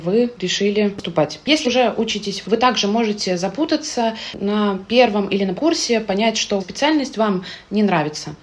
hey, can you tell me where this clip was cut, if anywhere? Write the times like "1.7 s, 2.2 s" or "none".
1.6 s, 2.4 s, 5.5 s, 6.6 s